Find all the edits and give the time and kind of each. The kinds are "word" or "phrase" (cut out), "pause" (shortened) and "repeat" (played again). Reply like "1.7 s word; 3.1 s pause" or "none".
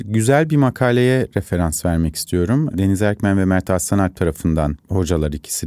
4.8 s word